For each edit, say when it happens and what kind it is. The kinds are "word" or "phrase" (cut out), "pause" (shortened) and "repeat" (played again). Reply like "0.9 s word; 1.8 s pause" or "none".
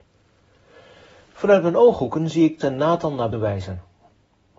2.6 s word; 3.3 s word